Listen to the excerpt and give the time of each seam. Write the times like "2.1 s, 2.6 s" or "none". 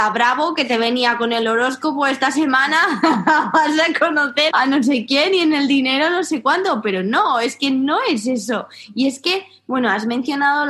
4.5 s